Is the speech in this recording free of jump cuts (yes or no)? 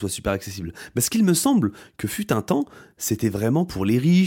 yes